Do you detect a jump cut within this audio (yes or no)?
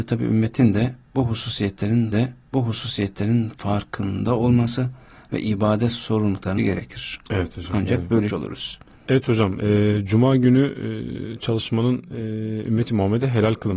yes